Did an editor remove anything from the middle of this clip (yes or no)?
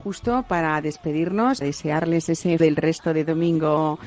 yes